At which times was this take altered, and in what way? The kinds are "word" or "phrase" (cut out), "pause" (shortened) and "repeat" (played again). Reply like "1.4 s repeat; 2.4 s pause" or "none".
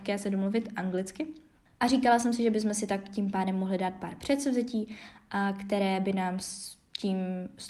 none